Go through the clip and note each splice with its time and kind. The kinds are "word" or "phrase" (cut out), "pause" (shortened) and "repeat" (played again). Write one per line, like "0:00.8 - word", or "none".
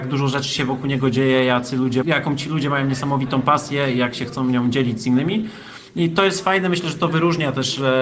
0:02.0 - word